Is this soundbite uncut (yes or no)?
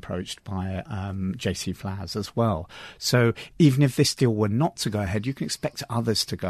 yes